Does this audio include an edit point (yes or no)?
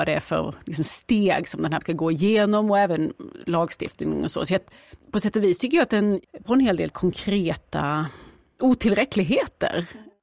yes